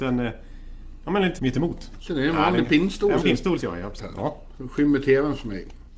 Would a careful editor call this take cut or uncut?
cut